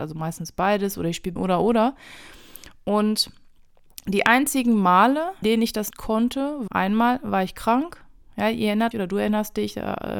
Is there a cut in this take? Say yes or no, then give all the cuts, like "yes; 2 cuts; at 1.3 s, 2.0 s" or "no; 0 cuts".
yes; 5 cuts; at 1.4 s, 5.4 s, 5.9 s, 6.7 s, 8.9 s